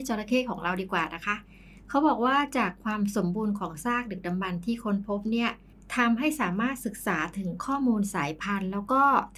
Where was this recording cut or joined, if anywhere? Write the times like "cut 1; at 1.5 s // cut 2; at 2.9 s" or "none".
none